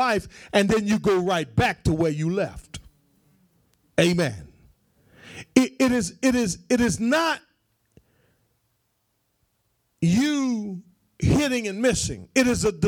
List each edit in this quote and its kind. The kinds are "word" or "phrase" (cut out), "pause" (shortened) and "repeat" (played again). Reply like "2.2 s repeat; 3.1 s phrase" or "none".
none